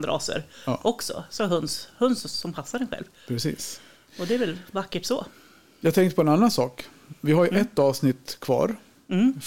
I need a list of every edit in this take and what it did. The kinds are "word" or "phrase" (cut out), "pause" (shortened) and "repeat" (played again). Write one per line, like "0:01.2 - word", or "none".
none